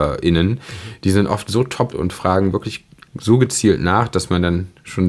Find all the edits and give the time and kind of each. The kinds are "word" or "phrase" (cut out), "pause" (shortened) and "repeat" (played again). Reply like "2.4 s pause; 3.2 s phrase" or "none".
1.9 s word; 3.1 s word